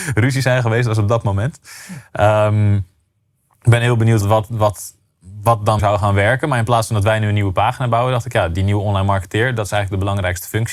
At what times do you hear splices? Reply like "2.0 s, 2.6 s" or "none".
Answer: 4.2 s, 5.8 s